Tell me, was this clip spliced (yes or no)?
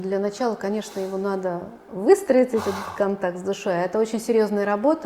no